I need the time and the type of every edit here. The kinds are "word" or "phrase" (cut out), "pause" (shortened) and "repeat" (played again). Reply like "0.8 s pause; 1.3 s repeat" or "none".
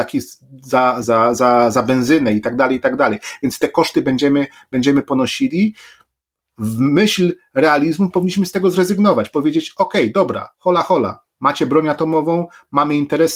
1.0 s phrase; 10.5 s pause